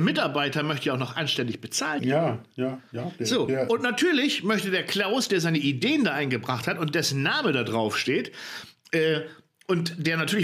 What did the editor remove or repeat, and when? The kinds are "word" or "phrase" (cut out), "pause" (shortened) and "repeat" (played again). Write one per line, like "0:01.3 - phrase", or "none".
none